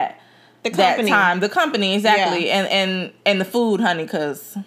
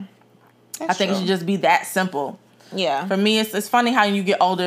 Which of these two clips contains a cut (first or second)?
first